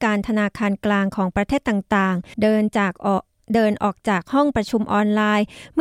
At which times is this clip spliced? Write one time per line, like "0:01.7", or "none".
0:02.3